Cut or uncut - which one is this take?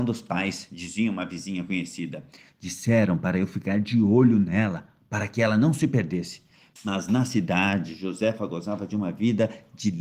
uncut